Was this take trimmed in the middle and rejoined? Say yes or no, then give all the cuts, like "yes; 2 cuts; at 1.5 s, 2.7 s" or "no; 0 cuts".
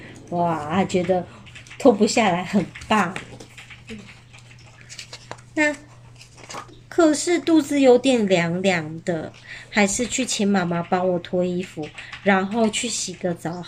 yes; 1 cut; at 6.7 s